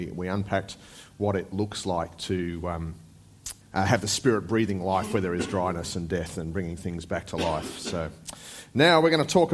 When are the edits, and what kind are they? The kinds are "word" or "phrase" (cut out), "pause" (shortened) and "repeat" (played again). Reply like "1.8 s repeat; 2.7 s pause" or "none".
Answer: 3.6 s pause